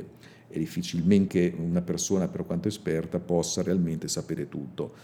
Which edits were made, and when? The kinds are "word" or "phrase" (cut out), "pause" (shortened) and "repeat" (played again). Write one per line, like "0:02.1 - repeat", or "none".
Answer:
0:01.3 - word